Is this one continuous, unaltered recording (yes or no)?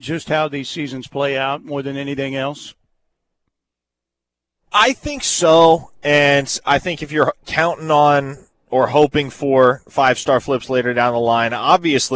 yes